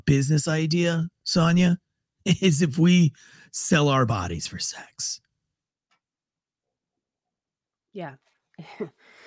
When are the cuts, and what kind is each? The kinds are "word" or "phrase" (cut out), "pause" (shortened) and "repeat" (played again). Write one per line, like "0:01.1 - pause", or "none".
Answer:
none